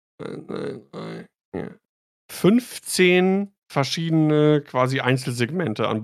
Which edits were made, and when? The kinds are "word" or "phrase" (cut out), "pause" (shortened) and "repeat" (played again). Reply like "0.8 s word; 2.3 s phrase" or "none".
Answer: none